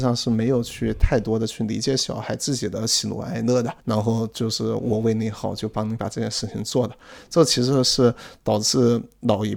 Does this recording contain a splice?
yes; 1 cut; at 3.8 s

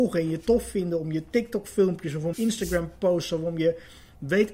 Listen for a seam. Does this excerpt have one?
yes; 1 cut; at 2.3 s

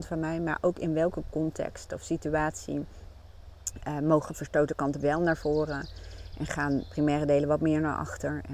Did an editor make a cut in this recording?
yes; 1 cut; at 5.0 s

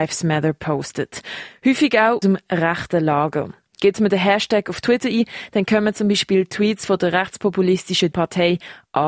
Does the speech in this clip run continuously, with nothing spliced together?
no; 2 cuts; at 2.2 s, 8.1 s

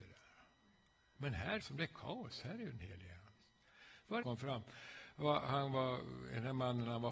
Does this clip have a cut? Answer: yes; 3 cuts; at 1.6 s, 3.4 s, 4.2 s

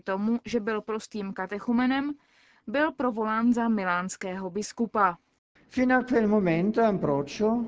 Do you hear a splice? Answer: no; 0 cuts

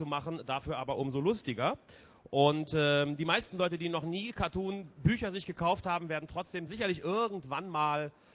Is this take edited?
no; 0 cuts

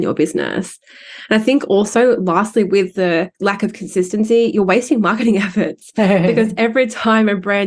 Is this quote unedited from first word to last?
no; 1 cut; at 3.3 s

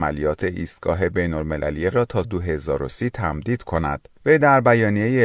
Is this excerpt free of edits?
no; 3 cuts; at 1.9 s, 2.2 s, 4.2 s

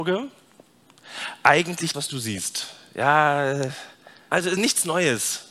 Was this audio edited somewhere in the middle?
yes; 2 cuts; at 1.9 s, 4.3 s

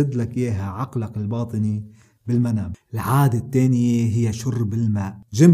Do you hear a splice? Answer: no; 0 cuts

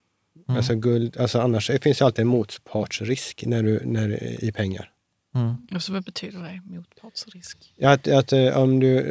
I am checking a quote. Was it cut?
no; 0 cuts

